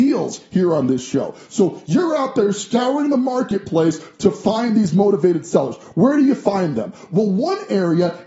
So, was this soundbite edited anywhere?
no; 0 cuts

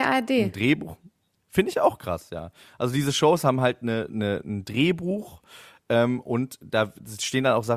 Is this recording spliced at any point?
no; 0 cuts

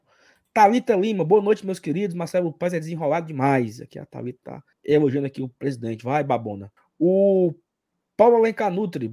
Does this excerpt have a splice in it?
yes; 2 cuts; at 4.7 s, 6.8 s

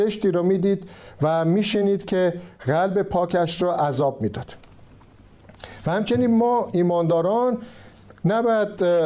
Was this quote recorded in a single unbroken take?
yes; 0 cuts

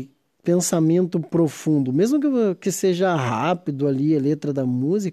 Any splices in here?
no; 0 cuts

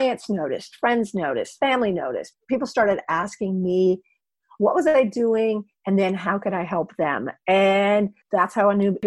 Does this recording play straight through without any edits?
yes; 0 cuts

